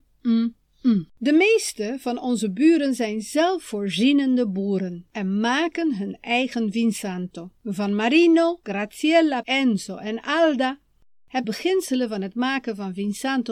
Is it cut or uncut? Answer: cut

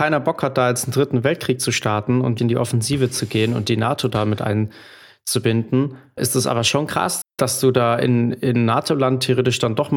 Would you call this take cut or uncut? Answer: cut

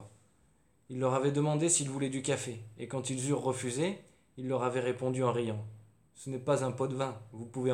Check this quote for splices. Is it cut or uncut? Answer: uncut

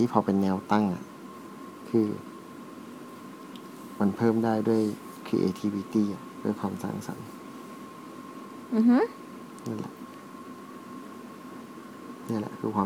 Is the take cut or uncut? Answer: uncut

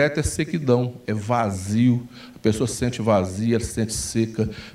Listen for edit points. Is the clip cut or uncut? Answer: uncut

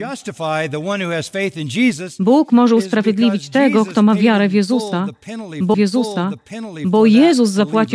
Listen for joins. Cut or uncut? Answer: cut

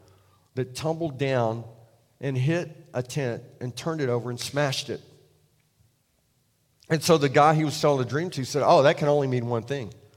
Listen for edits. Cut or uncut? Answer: uncut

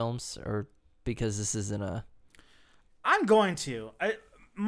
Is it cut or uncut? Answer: uncut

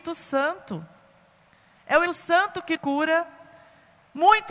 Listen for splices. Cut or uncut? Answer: cut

